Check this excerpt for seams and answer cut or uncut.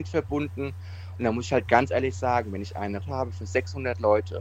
cut